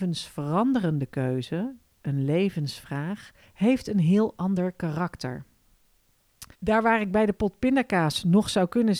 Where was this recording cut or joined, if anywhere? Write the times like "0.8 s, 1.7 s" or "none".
3.4 s, 6.5 s